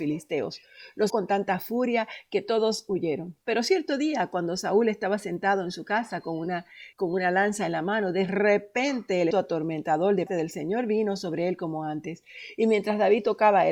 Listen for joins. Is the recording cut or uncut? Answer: cut